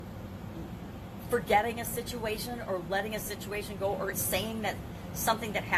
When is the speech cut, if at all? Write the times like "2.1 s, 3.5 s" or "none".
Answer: 4.1 s